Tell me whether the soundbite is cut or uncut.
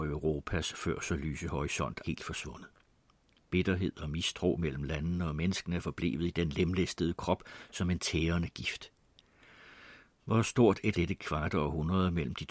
cut